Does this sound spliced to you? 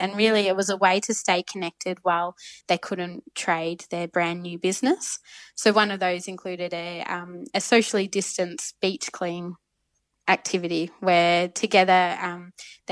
no; 0 cuts

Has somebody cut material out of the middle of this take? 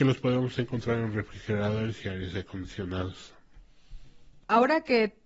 no; 0 cuts

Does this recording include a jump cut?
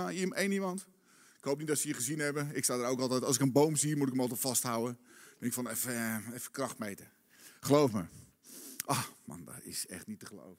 no; 0 cuts

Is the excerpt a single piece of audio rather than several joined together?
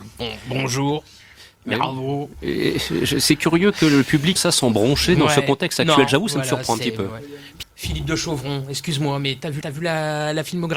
no; 3 cuts; at 4.4 s, 7.6 s, 9.6 s

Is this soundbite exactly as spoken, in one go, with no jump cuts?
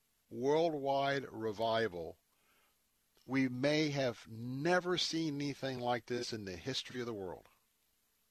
yes; 0 cuts

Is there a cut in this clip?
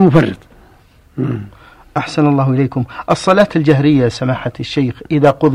no; 0 cuts

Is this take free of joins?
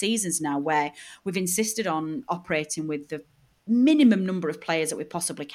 yes; 0 cuts

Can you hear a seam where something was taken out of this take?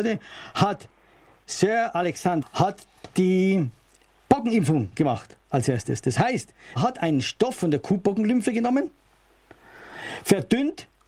yes; 3 cuts; at 1.4 s, 2.4 s, 6.8 s

